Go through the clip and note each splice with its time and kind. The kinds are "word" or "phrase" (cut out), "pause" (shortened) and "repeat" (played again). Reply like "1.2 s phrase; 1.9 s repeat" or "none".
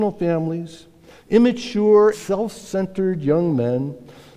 2.1 s word

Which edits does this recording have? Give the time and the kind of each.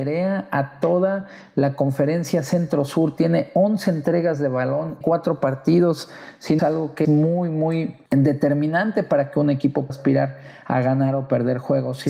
5.0 s word; 6.6 s phrase; 7.0 s word; 8.1 s pause; 9.9 s word

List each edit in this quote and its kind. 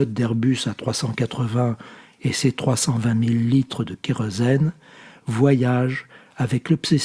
none

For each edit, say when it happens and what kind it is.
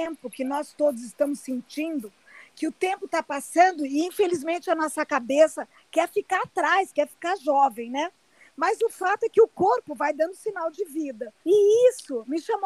11.4 s pause

